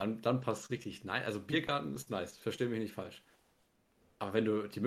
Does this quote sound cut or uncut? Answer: uncut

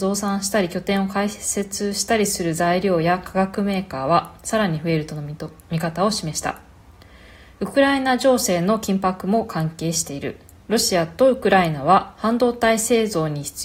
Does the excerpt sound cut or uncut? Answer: cut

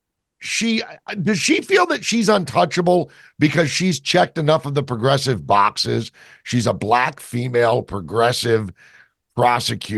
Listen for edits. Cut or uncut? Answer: uncut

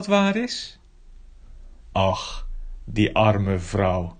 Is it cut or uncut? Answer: cut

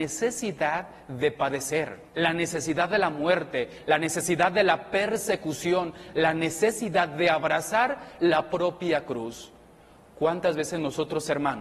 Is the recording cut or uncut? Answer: cut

